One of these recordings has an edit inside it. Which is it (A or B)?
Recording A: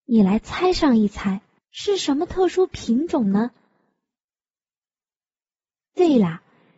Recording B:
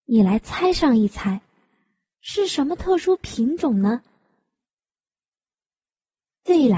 A